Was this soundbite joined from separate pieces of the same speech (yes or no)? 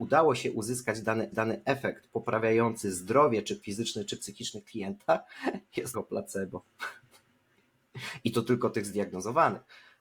yes